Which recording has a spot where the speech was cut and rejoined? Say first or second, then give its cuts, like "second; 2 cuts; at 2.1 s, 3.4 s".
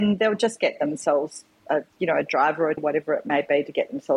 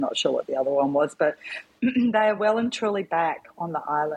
first; 2 cuts; at 1.9 s, 2.8 s